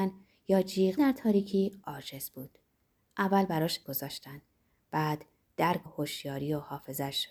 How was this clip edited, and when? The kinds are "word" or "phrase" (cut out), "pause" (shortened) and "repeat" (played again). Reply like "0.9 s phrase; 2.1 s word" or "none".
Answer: 1.0 s word; 3.8 s word; 5.9 s word